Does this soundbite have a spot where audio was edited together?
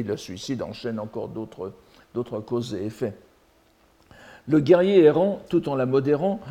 no; 0 cuts

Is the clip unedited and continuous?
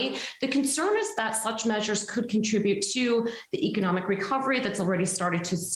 yes; 0 cuts

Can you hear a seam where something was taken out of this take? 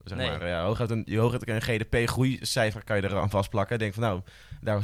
no; 0 cuts

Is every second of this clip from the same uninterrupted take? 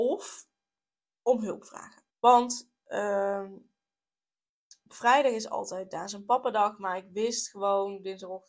no; 1 cut; at 2.1 s

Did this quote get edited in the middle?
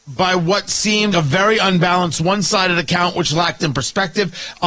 yes; 2 cuts; at 1.1 s, 3.6 s

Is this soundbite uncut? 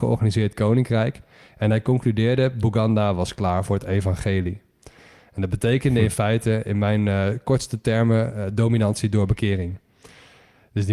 yes; 0 cuts

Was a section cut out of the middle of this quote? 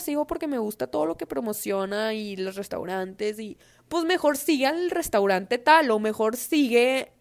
no; 0 cuts

